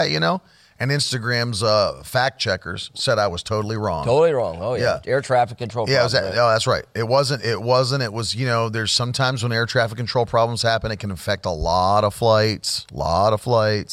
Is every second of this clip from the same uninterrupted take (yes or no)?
yes